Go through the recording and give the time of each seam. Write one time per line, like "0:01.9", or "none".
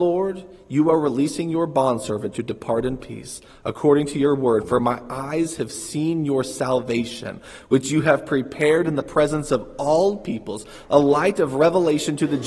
none